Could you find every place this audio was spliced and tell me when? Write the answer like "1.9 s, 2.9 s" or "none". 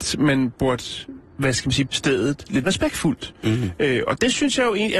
1.3 s, 1.9 s, 2.6 s